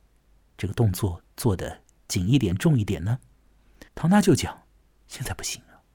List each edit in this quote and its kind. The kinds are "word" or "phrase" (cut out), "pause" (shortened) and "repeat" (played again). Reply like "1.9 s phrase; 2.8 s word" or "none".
3.9 s pause